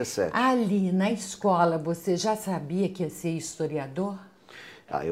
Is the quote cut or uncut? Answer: uncut